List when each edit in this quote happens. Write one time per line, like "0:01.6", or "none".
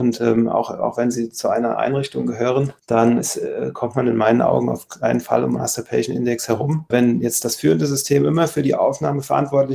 0:03.2
0:05.6